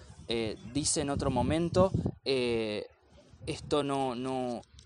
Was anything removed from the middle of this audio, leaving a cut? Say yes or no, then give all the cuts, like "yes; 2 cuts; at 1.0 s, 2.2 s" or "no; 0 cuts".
no; 0 cuts